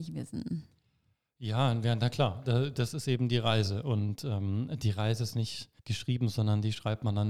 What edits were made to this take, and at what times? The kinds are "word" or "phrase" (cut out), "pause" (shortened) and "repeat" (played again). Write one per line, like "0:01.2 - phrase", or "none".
0:05.8 - pause